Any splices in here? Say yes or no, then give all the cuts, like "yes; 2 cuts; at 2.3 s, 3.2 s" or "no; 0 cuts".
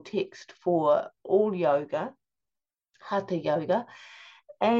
no; 0 cuts